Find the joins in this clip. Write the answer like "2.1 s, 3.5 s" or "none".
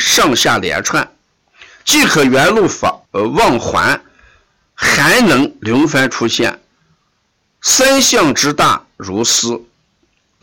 3.1 s